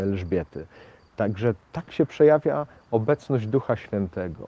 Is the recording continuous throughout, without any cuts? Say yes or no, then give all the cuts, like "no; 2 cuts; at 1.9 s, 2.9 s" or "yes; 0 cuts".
yes; 0 cuts